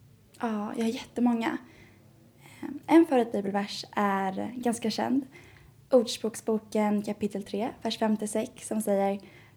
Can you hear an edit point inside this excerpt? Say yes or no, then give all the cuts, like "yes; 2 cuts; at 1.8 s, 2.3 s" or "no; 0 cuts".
no; 0 cuts